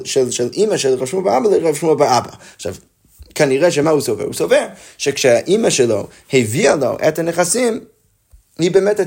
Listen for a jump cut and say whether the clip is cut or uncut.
uncut